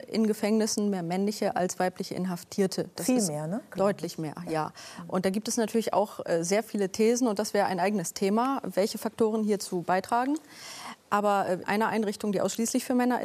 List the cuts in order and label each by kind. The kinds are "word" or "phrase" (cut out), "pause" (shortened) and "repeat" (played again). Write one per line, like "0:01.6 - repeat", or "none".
0:11.6 - phrase